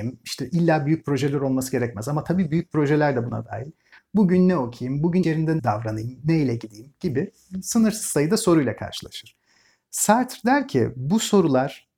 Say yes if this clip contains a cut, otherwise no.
yes